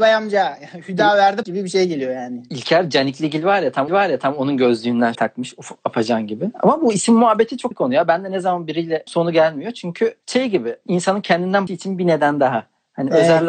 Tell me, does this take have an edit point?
yes; 6 cuts; at 1.4 s, 3.9 s, 5.1 s, 7.7 s, 9.1 s, 11.7 s

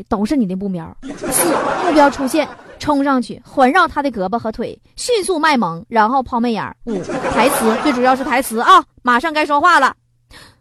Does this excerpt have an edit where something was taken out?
yes; 1 cut; at 8.9 s

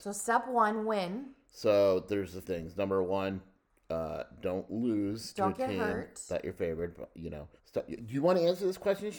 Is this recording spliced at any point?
yes; 2 cuts; at 2.4 s, 7.6 s

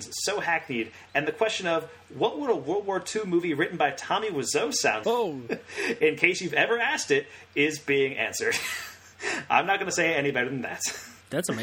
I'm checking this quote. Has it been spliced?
yes; 1 cut; at 5.0 s

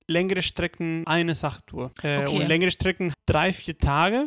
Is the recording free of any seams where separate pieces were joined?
no; 3 cuts; at 1.0 s, 1.9 s, 3.1 s

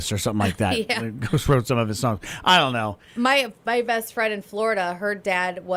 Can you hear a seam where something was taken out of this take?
no; 0 cuts

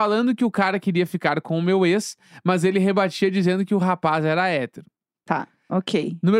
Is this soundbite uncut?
yes; 0 cuts

